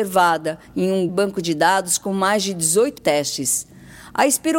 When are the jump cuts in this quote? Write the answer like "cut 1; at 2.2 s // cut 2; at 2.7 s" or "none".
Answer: cut 1; at 1.1 s // cut 2; at 3.0 s

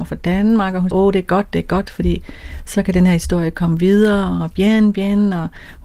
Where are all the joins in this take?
cut 1; at 0.9 s

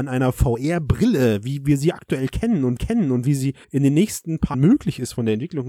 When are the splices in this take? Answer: cut 1; at 2.8 s // cut 2; at 3.6 s // cut 3; at 4.5 s

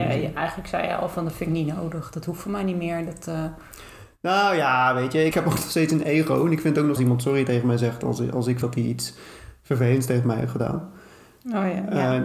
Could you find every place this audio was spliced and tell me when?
cut 1; at 5.3 s // cut 2; at 7.0 s // cut 3; at 8.6 s

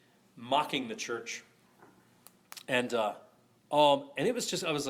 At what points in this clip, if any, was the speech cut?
none

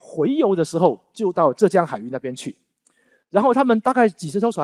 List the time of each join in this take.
none

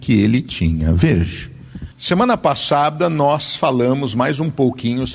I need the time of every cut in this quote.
cut 1; at 1.9 s

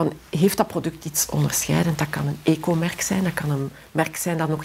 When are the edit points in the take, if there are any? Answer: none

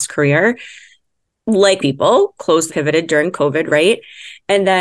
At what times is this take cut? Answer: cut 1; at 1.8 s // cut 2; at 2.7 s

